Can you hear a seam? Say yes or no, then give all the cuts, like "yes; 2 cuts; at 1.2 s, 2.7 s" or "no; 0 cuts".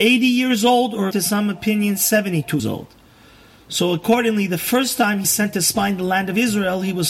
yes; 3 cuts; at 1.1 s, 2.6 s, 5.2 s